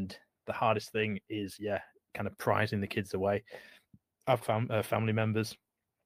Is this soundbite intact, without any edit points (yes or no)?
no